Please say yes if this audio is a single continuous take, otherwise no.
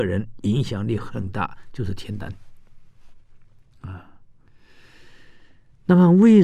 yes